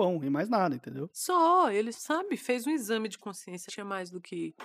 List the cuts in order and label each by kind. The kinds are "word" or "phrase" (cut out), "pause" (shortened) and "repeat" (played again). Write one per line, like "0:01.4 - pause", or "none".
0:01.9 - word
0:03.7 - phrase